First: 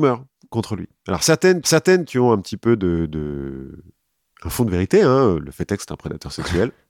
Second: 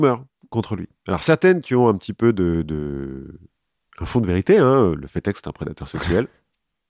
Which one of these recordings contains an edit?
first; 1 cut; at 1.6 s

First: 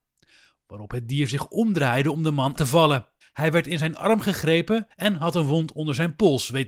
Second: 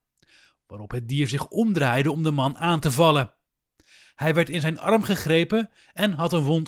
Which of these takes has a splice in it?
first; 3 cuts; at 2.6 s, 3.2 s, 4.9 s

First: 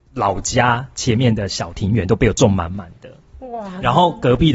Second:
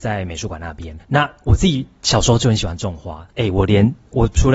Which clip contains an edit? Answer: second; 2 cuts; at 1.0 s, 3.3 s

